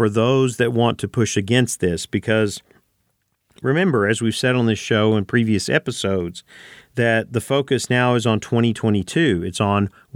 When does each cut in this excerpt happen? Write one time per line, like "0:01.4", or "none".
none